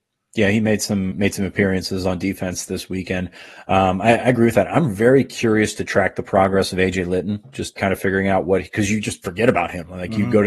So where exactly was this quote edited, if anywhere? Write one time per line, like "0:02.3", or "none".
0:01.1
0:07.8